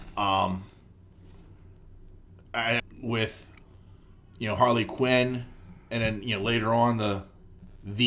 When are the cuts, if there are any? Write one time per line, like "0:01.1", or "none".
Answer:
0:02.8